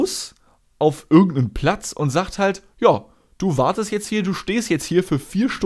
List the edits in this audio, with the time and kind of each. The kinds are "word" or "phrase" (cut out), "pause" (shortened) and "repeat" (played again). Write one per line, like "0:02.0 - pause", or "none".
none

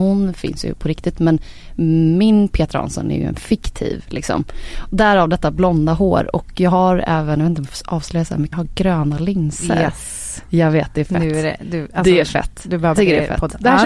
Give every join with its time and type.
0:08.5 - word
0:13.0 - word

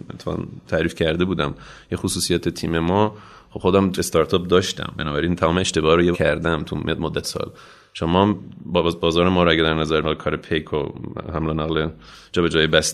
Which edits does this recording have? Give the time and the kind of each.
0:03.9 - word
0:06.1 - word
0:07.2 - word
0:10.0 - word

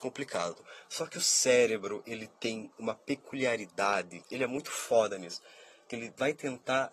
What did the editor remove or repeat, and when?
0:04.3 - word

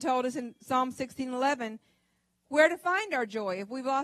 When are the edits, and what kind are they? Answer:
none

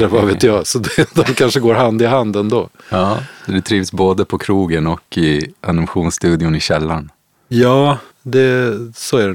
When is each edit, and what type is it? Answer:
0:08.1 - pause

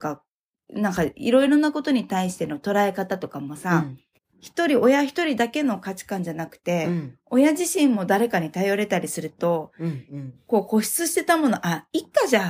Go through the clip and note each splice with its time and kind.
0:04.2 - pause

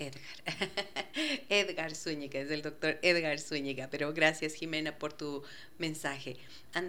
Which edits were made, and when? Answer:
none

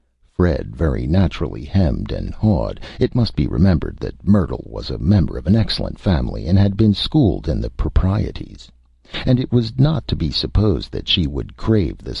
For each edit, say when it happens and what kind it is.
none

